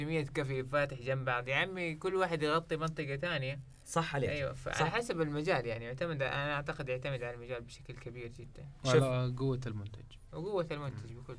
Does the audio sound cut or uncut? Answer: uncut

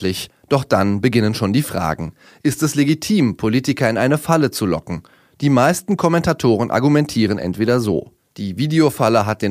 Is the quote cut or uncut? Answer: uncut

